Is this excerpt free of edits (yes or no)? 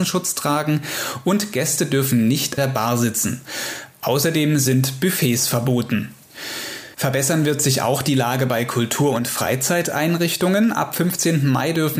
no